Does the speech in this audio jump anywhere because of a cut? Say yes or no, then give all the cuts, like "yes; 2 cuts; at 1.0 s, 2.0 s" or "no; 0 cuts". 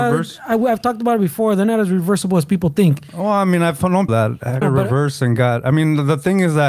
yes; 2 cuts; at 4.1 s, 4.6 s